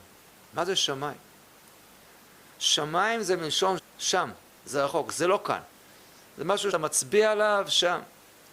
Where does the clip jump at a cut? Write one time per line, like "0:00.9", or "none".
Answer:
0:03.8
0:06.7